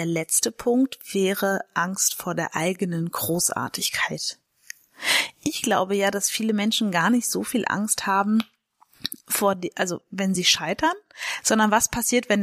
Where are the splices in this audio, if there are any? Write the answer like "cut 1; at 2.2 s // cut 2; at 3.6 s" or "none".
none